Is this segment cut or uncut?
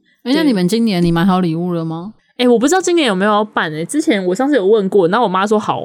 cut